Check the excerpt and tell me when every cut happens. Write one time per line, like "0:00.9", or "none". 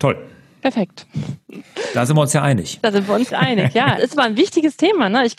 0:03.3
0:04.0